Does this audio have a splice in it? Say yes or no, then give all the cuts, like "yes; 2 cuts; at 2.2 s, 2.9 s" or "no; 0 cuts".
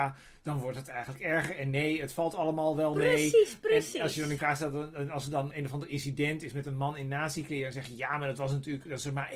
yes; 2 cuts; at 4.4 s, 5.5 s